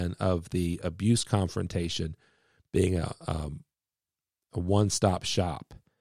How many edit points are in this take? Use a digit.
0